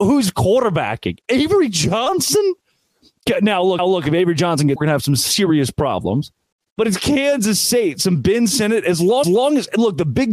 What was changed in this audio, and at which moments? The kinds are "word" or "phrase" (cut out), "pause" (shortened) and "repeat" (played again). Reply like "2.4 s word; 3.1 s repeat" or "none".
3.8 s repeat; 4.8 s phrase; 6.5 s pause; 9.2 s repeat